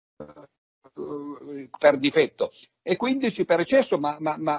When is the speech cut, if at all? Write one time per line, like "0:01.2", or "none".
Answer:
none